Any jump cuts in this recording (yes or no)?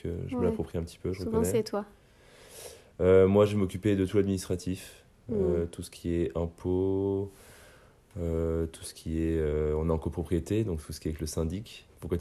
no